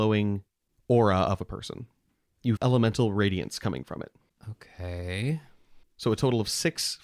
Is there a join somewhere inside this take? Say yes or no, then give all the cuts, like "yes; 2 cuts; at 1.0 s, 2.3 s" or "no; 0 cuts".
yes; 1 cut; at 2.6 s